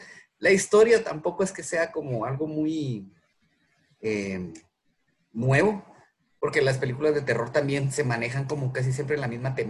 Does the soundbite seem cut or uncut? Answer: uncut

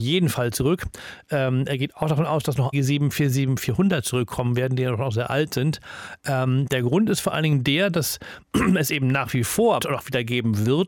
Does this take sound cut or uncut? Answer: cut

